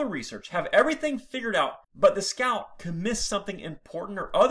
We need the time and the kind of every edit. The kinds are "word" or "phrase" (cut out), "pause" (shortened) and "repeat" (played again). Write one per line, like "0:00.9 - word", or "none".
0:01.8 - pause